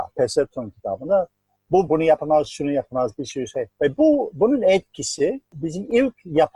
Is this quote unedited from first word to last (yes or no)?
no